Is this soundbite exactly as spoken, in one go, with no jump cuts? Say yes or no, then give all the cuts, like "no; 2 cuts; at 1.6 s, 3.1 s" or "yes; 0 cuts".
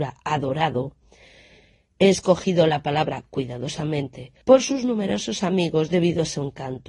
no; 1 cut; at 4.4 s